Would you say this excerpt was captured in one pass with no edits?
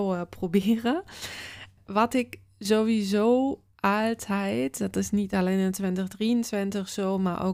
yes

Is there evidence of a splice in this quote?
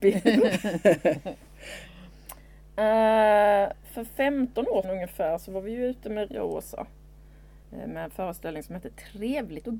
yes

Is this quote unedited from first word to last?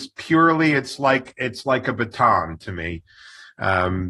yes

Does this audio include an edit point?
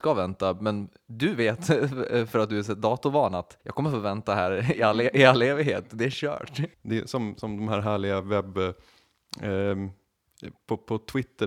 yes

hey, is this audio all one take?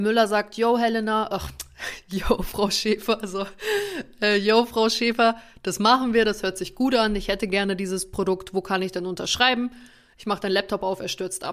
yes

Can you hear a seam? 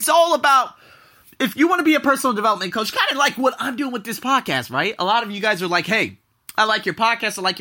no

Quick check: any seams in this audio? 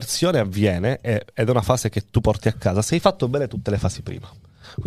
no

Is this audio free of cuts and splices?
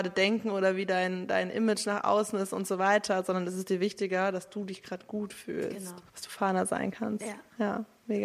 no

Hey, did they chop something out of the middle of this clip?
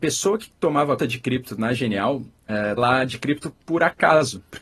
yes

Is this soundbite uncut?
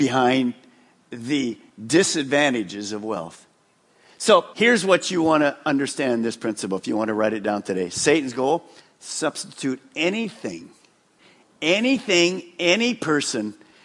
no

